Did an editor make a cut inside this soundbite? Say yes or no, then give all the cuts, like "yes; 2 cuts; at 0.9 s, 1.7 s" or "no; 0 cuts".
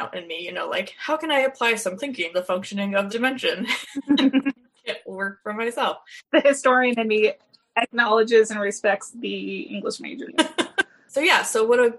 yes; 4 cuts; at 2.0 s, 2.3 s, 3.1 s, 10.3 s